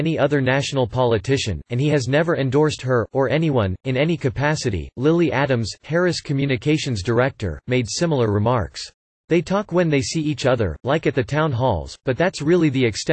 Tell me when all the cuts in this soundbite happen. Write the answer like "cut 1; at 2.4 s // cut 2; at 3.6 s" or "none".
cut 1; at 9.0 s